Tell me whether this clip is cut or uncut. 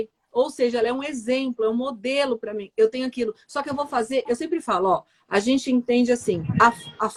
uncut